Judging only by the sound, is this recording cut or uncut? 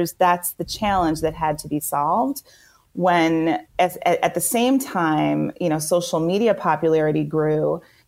cut